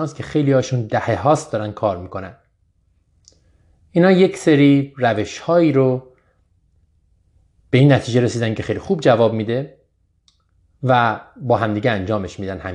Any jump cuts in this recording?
no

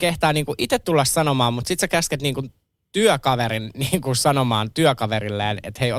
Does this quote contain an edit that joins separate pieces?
no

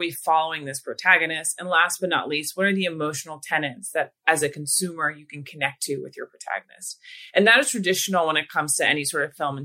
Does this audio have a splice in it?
no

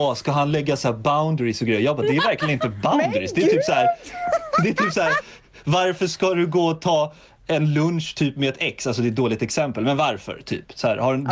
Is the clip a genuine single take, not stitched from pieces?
yes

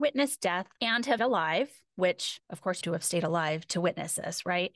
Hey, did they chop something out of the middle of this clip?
yes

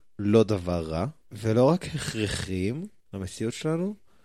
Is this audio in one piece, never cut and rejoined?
no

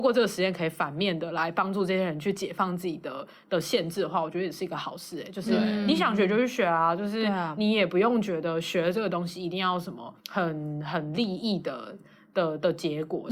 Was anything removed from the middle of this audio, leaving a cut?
yes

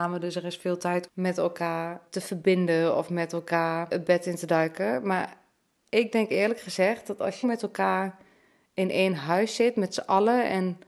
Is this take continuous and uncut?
no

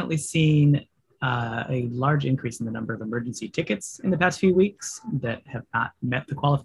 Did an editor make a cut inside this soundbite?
no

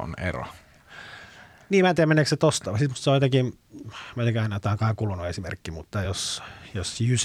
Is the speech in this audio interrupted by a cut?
no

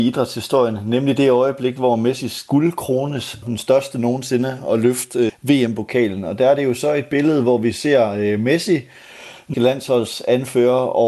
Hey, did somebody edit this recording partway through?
yes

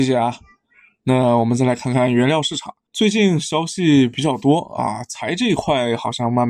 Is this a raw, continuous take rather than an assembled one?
no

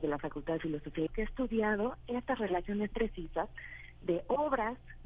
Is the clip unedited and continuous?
no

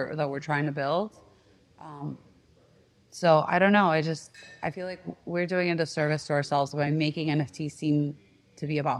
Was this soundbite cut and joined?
no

